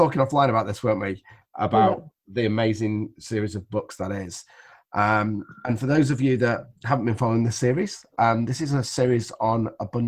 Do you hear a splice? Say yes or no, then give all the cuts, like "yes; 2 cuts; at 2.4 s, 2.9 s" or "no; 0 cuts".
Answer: yes; 1 cut; at 6.8 s